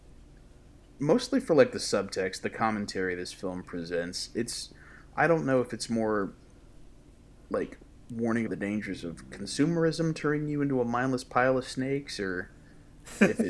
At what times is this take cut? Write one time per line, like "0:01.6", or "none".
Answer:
0:08.5